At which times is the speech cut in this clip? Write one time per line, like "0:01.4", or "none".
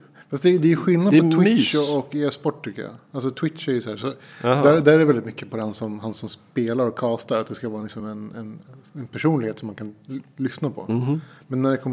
none